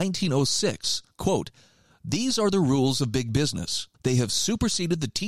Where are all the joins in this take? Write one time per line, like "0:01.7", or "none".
0:03.9

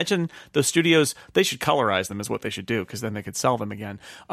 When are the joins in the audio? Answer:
none

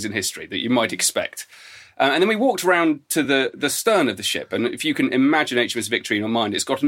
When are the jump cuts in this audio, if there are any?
none

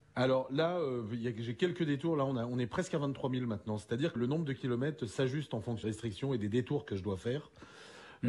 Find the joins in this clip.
0:04.2
0:05.8

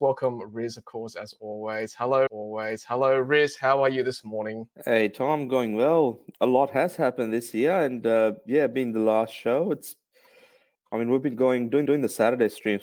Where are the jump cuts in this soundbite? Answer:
0:02.3
0:04.7
0:06.3
0:10.7
0:11.9

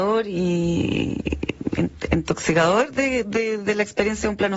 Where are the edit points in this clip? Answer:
none

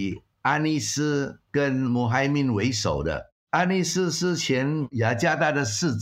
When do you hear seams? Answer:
0:03.4

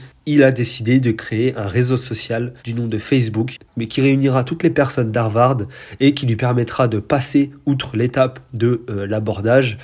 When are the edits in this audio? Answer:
0:02.6

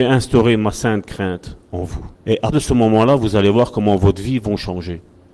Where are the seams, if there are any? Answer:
0:01.6
0:02.1
0:02.5

